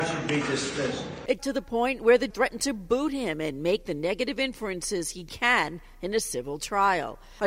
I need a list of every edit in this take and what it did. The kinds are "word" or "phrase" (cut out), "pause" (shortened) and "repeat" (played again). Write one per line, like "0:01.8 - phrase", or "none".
0:01.4 - word
0:02.3 - word